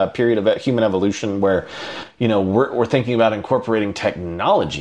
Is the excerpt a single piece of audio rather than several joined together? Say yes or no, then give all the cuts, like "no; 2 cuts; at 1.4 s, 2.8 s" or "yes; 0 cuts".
yes; 0 cuts